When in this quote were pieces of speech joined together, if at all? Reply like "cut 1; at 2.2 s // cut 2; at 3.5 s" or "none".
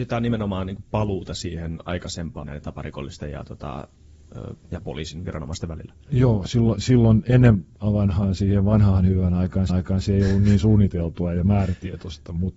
cut 1; at 2.4 s // cut 2; at 7.7 s // cut 3; at 9.7 s